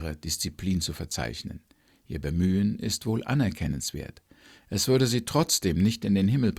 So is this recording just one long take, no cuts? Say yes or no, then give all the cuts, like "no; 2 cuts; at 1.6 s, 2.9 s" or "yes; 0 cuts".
yes; 0 cuts